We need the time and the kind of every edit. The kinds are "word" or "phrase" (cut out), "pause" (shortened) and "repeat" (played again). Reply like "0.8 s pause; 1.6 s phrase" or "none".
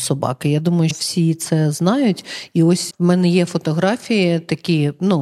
0.9 s word; 2.9 s word